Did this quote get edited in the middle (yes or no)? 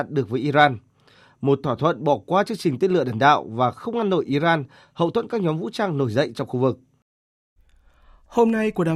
no